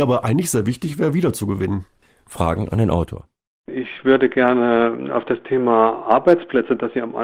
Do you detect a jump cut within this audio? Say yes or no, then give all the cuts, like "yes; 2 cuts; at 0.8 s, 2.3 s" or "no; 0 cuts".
no; 0 cuts